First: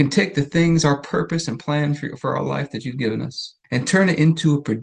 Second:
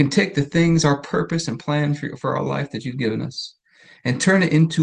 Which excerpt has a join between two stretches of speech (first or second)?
first